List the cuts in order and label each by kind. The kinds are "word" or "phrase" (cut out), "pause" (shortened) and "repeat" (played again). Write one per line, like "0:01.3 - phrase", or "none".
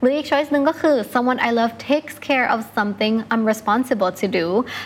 none